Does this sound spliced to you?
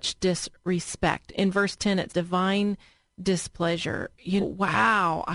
yes; 3 cuts; at 1.3 s, 2.1 s, 4.4 s

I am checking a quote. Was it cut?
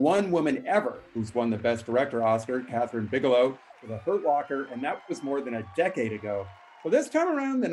no; 0 cuts

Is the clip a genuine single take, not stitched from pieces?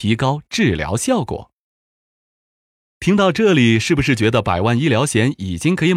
yes; 0 cuts

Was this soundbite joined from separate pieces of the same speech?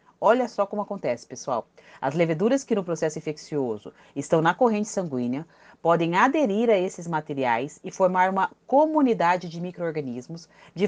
no; 0 cuts

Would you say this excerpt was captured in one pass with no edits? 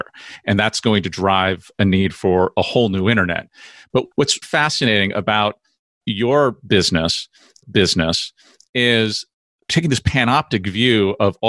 no; 2 cuts; at 4.4 s, 7.6 s

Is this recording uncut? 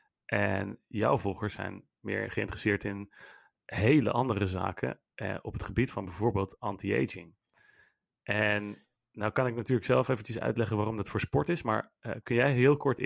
yes; 0 cuts

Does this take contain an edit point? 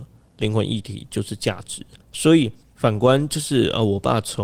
no; 0 cuts

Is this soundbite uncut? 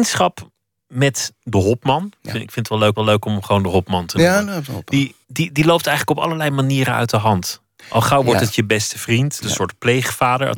no; 4 cuts; at 1.4 s, 2.9 s, 5.2 s, 9.4 s

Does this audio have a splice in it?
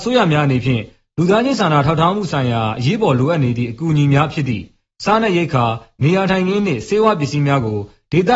no; 0 cuts

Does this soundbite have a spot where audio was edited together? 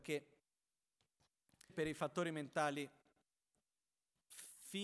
yes; 1 cut; at 1.7 s

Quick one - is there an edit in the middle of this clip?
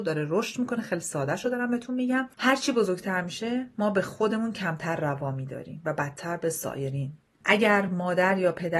no; 0 cuts

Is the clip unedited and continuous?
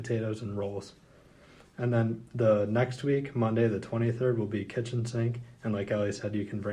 yes; 0 cuts

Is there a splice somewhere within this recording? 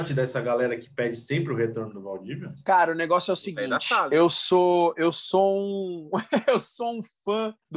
no; 0 cuts

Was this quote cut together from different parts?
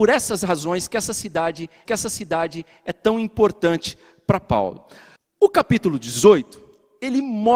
yes; 2 cuts; at 1.9 s, 5.2 s

